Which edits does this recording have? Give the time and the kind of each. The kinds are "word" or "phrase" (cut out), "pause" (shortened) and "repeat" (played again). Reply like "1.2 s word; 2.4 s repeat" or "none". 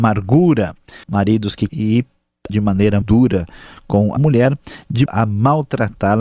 1.0 s pause; 1.7 s word; 2.5 s word; 3.0 s word; 4.2 s word; 5.1 s word